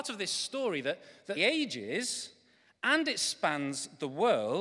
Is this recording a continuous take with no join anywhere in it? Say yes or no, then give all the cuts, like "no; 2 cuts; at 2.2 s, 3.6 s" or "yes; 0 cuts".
no; 1 cut; at 1.4 s